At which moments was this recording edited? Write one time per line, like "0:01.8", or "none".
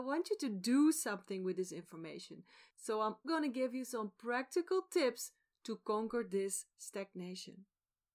0:03.2